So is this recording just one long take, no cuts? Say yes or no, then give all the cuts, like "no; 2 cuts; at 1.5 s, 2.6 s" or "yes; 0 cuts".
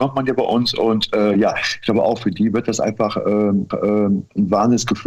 no; 1 cut; at 3.7 s